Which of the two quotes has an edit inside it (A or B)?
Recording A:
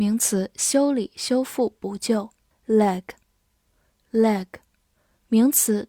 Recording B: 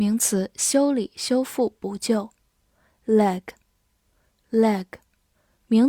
A